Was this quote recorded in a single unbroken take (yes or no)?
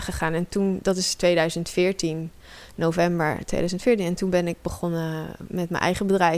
yes